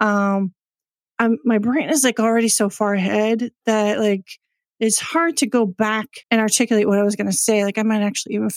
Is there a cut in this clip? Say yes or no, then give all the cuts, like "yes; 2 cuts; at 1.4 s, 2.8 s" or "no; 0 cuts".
yes; 1 cut; at 6.2 s